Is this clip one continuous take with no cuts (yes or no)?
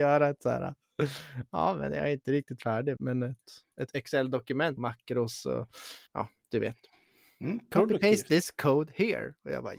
no